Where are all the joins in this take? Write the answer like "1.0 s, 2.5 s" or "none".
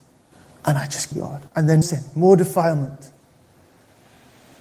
1.1 s, 1.5 s, 1.8 s